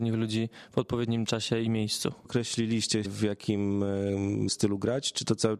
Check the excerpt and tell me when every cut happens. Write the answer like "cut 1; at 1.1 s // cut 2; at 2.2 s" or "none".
cut 1; at 3.0 s // cut 2; at 4.5 s